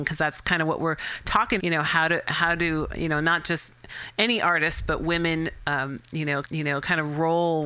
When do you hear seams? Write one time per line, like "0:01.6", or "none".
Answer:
0:01.6
0:06.4